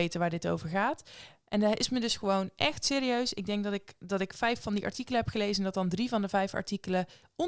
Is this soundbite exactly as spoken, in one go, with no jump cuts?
yes; 0 cuts

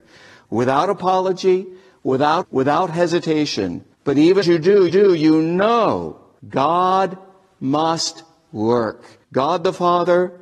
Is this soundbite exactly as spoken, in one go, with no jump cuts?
no; 6 cuts; at 2.4 s, 3.9 s, 4.4 s, 4.9 s, 6.4 s, 9.2 s

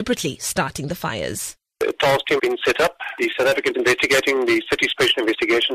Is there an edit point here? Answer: yes; 3 cuts; at 1.7 s, 2.4 s, 3.7 s

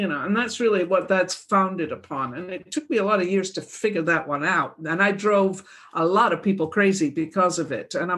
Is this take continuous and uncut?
yes; 0 cuts

